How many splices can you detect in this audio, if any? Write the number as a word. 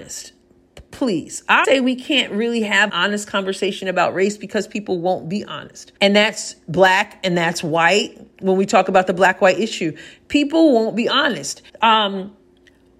four